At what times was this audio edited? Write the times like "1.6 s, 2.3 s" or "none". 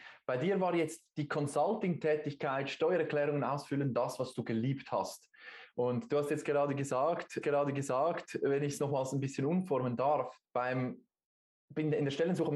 7.4 s, 10.5 s